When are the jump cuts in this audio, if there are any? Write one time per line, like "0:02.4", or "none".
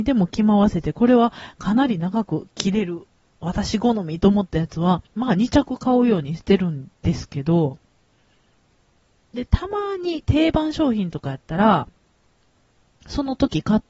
0:05.1

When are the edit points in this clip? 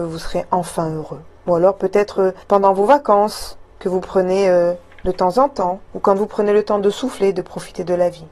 0:01.4
0:02.4
0:03.7
0:05.9

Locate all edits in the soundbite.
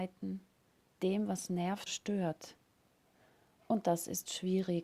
0:01.0
0:01.9

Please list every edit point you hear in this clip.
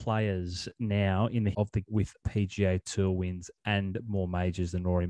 0:01.5
0:01.8
0:02.2

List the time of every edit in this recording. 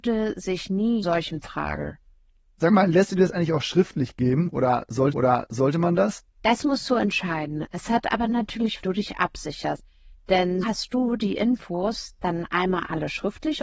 0:01.0
0:05.1
0:06.3
0:08.8
0:10.6

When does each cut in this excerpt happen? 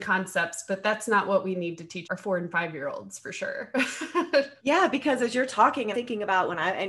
0:02.0
0:04.6
0:05.9

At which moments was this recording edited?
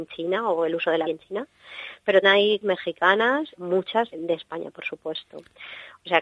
0:01.0
0:02.2
0:02.6
0:03.5
0:04.1

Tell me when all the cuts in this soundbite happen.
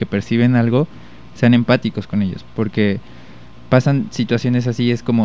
none

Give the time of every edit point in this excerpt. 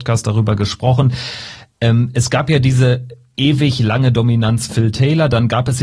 0:04.7

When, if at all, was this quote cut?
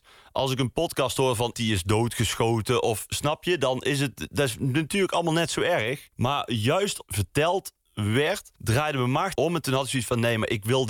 0:01.5
0:06.1
0:07.0
0:08.6
0:09.3

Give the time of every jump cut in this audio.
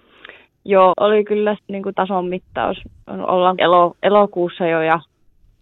0:00.9
0:01.6
0:01.9
0:03.6

